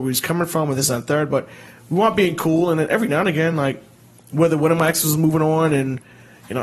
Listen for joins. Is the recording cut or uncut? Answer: uncut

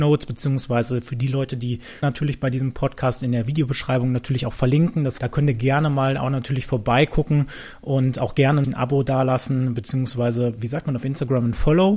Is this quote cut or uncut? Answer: cut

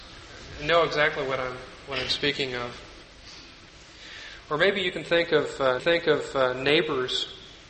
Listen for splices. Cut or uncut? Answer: cut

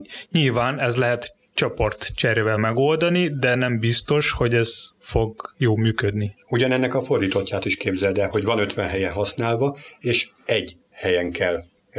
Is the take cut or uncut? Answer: uncut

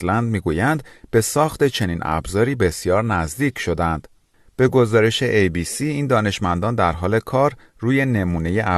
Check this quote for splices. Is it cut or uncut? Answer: uncut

